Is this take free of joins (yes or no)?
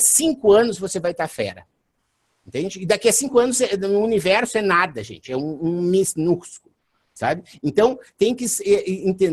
yes